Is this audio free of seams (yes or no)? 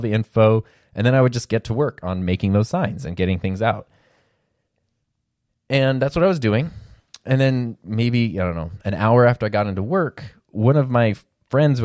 yes